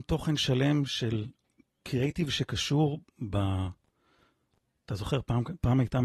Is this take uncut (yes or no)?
yes